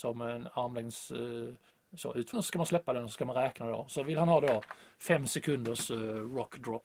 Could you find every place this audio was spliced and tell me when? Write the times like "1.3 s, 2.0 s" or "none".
1.7 s, 2.3 s